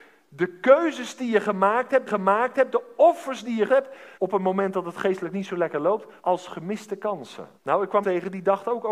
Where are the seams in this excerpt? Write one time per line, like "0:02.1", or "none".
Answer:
0:02.1
0:03.7
0:04.1
0:06.2
0:07.6
0:08.0